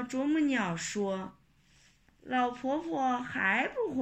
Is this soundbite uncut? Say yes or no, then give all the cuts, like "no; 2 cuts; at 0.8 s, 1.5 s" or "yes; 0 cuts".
no; 1 cut; at 1.4 s